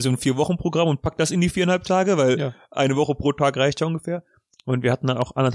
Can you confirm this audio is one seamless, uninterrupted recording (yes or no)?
yes